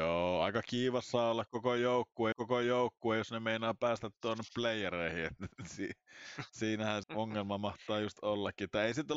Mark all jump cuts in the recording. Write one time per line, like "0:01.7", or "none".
0:02.3
0:07.0

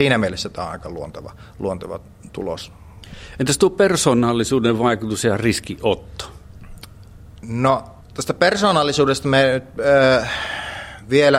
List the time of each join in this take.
0:08.0

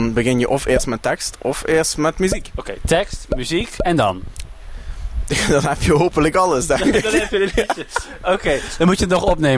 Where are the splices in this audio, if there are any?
none

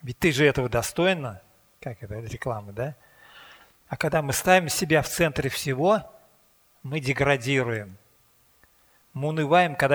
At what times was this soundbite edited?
none

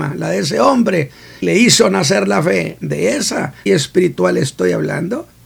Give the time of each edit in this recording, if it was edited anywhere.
0:01.4
0:03.7

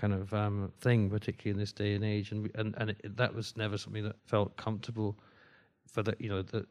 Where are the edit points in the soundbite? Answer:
0:04.2

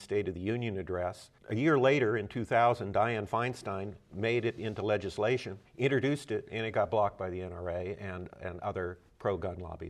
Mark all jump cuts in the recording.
0:01.4
0:05.7

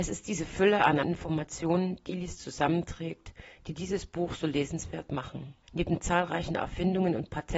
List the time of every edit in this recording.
0:01.0
0:02.1
0:05.6

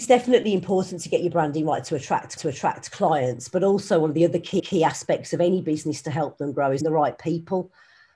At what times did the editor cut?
0:02.4
0:04.6
0:06.8

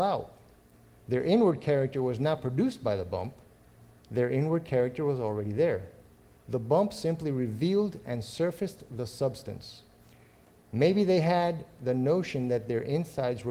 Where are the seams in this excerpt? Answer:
none

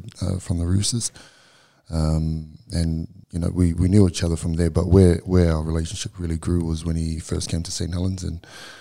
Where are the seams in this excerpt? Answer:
0:03.2

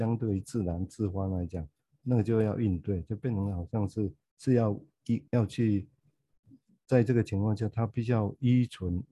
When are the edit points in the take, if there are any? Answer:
0:05.3

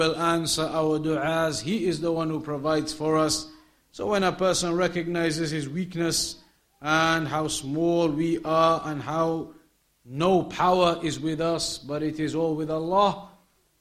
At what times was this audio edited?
none

